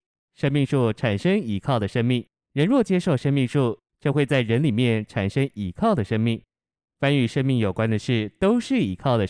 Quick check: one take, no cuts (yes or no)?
no